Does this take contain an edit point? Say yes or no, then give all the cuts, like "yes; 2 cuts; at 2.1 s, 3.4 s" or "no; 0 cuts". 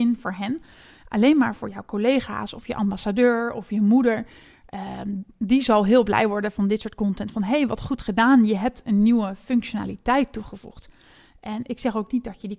no; 0 cuts